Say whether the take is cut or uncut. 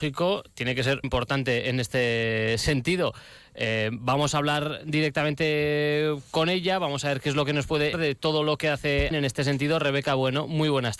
cut